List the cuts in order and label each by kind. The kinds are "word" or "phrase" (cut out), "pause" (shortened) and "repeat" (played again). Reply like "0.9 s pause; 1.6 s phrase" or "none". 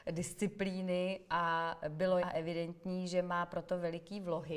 2.2 s word